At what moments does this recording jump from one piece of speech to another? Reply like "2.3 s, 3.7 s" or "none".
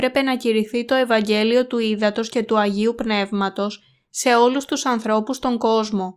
none